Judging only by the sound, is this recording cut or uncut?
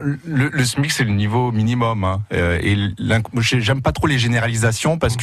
uncut